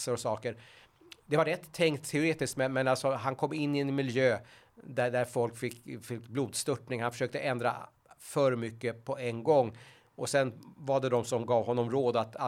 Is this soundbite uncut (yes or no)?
yes